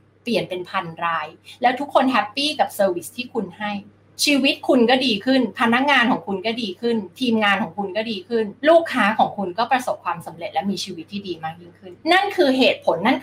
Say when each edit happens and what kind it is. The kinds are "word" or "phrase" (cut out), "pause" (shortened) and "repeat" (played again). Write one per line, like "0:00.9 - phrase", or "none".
0:08.6 - pause
0:12.0 - pause